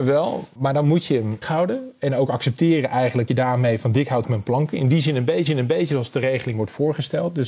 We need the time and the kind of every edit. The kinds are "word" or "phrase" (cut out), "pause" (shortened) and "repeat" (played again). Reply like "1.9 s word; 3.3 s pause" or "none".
1.4 s word; 3.3 s word; 4.2 s word; 5.5 s repeat